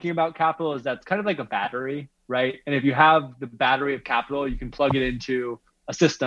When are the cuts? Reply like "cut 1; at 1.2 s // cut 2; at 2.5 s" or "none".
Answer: cut 1; at 2.2 s